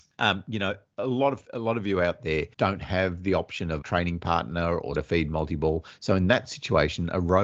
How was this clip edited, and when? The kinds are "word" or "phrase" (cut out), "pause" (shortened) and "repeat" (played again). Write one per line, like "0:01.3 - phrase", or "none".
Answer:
0:01.4 - pause
0:02.5 - pause
0:03.8 - word
0:04.9 - word